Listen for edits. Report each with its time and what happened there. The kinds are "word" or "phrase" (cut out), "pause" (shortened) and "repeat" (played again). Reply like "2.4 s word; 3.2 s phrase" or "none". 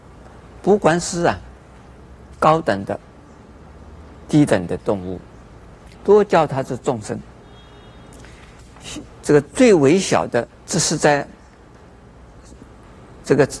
6.0 s pause; 10.5 s pause